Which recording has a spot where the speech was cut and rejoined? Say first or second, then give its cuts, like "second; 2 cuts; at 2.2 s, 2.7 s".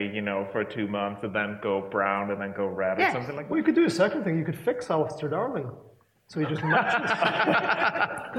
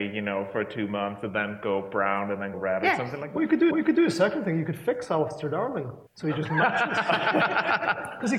second; 3 cuts; at 2.5 s, 3.7 s, 6.1 s